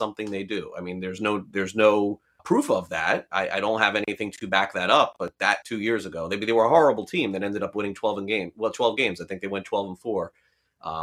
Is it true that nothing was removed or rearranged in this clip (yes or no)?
no